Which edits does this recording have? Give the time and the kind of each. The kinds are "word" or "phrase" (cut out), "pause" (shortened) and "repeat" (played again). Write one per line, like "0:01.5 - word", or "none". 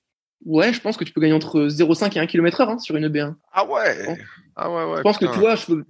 0:03.4 - pause